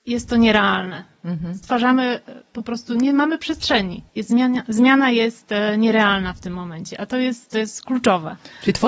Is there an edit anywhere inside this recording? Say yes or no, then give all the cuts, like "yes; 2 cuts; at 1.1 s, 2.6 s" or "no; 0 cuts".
yes; 1 cut; at 4.1 s